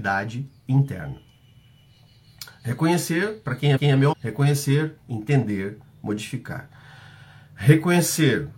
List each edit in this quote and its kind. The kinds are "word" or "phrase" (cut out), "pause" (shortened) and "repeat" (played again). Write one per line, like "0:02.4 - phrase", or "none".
0:03.8 - repeat
0:04.1 - word
0:05.0 - pause